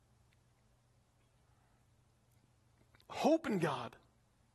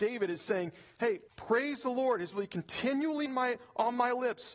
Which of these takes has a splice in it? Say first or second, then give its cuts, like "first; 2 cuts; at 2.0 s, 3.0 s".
second; 3 cuts; at 1.3 s, 2.3 s, 3.3 s